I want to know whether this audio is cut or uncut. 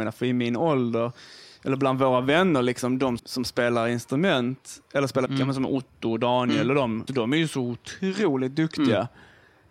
cut